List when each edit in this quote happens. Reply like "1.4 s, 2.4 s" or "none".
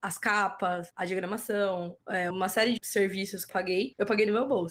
2.3 s, 2.8 s, 3.5 s